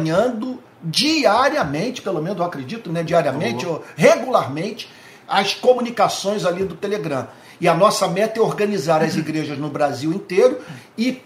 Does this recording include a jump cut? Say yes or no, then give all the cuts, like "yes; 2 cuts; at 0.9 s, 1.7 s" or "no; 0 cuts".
no; 0 cuts